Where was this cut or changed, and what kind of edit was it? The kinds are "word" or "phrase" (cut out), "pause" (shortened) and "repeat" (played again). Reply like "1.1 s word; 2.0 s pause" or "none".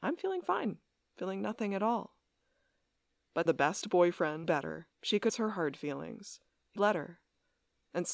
3.5 s word; 4.4 s phrase; 4.9 s pause; 5.3 s word; 6.8 s word